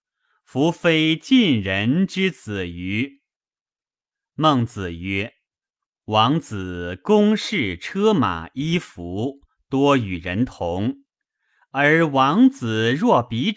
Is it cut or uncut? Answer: cut